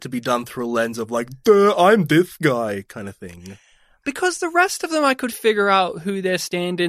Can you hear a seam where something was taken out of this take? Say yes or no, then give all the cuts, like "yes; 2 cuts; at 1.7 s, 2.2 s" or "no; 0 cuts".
no; 0 cuts